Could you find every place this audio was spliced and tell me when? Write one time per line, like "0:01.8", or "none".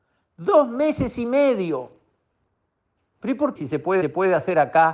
0:03.6
0:04.0